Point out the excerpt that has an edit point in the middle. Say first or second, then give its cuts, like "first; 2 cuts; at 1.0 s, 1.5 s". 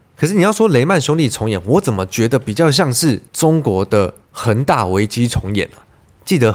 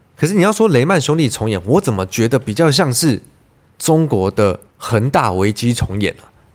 first; 1 cut; at 3.3 s